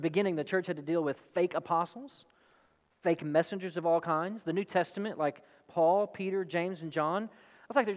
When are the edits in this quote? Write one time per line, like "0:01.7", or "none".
none